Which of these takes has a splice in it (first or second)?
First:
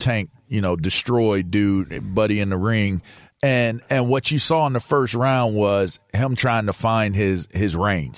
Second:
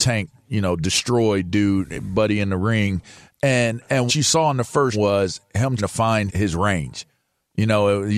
second